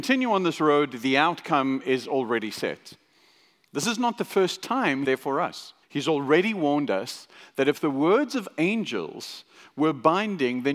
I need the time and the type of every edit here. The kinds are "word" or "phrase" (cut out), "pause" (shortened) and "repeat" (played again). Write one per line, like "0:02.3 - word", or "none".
0:05.0 - phrase
0:05.8 - pause